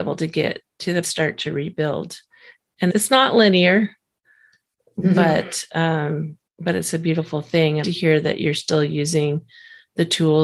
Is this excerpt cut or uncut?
cut